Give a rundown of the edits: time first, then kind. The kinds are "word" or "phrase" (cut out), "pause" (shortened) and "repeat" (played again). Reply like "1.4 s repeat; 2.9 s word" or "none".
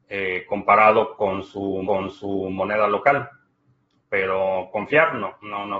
1.8 s repeat